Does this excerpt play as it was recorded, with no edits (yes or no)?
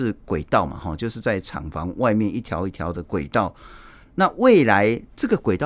yes